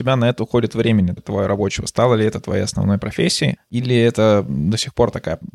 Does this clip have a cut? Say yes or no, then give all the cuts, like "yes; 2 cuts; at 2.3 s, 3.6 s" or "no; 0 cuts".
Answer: yes; 1 cut; at 1.2 s